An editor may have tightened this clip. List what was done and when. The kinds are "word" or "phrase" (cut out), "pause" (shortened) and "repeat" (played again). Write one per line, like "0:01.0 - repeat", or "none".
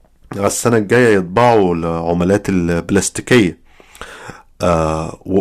none